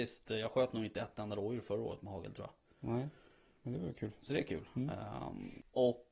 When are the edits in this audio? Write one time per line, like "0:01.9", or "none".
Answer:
none